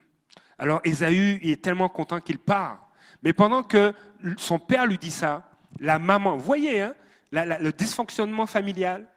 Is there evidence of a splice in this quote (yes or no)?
no